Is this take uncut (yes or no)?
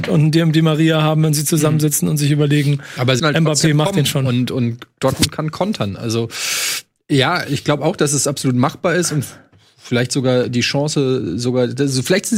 no